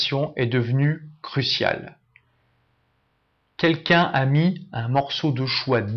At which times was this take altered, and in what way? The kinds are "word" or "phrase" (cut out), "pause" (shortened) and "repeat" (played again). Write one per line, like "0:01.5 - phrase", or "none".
none